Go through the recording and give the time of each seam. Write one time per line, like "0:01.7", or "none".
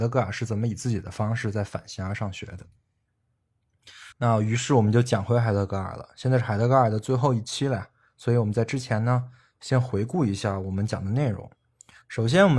0:04.1